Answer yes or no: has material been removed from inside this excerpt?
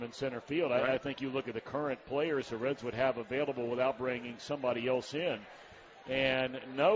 no